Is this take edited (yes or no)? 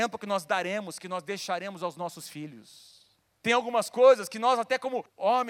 no